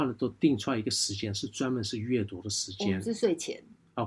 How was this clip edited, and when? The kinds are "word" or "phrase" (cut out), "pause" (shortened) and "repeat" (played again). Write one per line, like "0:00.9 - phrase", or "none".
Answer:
none